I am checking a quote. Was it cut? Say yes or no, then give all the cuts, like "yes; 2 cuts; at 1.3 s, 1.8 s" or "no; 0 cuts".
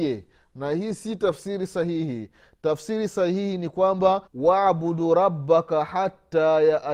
yes; 1 cut; at 4.3 s